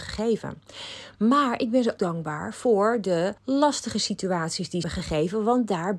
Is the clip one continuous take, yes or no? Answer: no